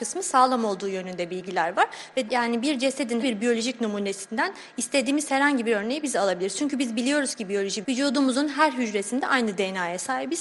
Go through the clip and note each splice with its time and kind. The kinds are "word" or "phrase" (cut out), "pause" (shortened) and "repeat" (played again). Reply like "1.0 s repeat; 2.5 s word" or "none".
2.3 s word; 3.2 s word; 7.8 s word